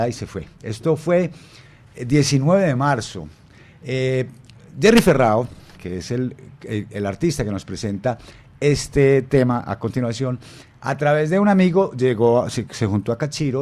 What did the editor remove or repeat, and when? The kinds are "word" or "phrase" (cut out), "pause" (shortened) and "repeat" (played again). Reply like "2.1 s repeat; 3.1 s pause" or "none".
none